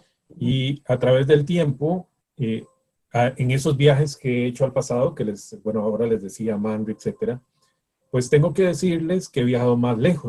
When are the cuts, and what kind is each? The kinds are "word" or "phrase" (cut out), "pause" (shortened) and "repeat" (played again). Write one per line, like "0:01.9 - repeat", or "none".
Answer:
none